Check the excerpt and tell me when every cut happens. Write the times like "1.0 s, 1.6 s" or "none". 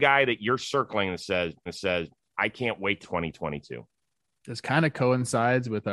1.7 s, 3.0 s, 4.0 s